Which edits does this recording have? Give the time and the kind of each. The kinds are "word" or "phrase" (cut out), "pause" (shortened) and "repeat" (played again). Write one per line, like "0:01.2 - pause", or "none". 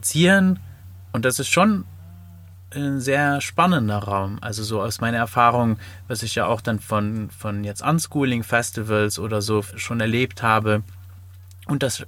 none